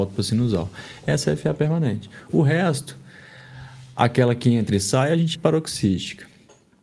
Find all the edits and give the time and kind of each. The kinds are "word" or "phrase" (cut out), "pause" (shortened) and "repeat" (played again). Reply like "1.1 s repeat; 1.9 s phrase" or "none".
5.3 s word